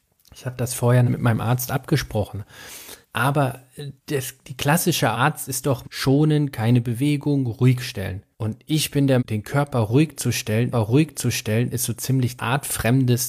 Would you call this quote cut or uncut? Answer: cut